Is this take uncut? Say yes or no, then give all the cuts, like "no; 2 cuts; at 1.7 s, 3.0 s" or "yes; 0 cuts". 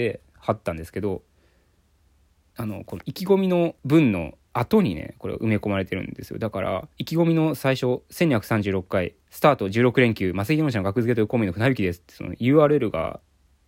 no; 3 cuts; at 3.8 s, 6.9 s, 9.2 s